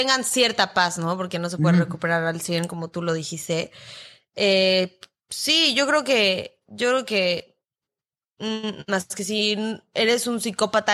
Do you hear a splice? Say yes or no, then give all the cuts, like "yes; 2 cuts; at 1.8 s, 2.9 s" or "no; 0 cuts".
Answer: no; 0 cuts